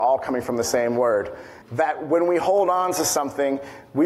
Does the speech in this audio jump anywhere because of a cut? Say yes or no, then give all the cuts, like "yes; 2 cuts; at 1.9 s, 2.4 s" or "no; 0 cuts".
yes; 1 cut; at 1.6 s